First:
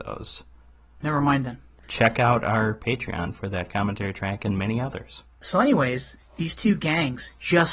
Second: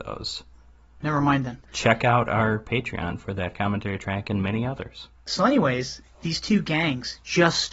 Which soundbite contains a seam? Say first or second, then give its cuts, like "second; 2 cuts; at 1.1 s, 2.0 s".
second; 1 cut; at 1.6 s